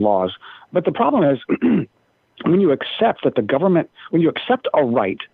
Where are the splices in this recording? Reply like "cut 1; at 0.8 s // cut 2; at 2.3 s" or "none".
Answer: none